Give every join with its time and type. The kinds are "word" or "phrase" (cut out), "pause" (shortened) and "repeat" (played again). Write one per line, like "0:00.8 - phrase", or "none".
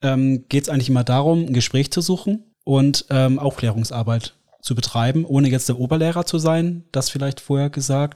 0:02.5 - pause